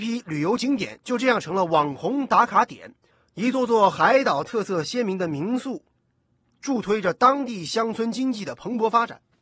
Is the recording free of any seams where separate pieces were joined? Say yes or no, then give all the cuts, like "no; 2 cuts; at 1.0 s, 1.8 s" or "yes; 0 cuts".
yes; 0 cuts